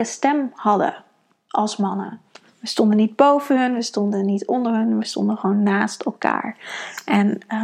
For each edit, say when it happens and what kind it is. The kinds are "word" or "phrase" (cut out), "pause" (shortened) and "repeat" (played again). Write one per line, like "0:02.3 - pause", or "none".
none